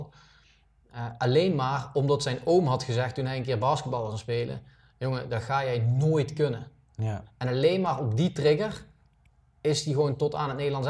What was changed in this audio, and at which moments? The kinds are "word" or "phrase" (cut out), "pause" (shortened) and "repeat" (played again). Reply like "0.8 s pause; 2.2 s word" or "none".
none